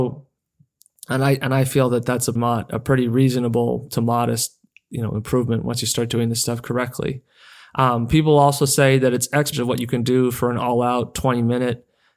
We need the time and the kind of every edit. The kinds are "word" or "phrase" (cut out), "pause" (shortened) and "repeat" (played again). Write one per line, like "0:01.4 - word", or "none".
0:02.4 - word
0:09.5 - word